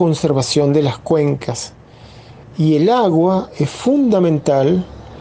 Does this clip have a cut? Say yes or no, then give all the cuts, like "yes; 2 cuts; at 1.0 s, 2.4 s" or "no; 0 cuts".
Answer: no; 0 cuts